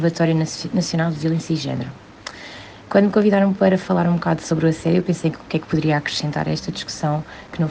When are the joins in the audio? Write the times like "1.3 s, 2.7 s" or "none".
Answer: none